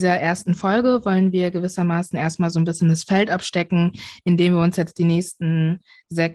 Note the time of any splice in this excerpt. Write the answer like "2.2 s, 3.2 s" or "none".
none